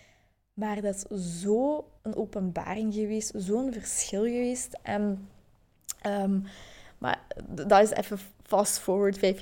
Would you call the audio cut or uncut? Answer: cut